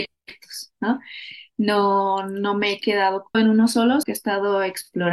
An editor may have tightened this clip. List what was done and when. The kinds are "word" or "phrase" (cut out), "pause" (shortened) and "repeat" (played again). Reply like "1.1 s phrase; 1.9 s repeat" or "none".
3.3 s word; 4.0 s word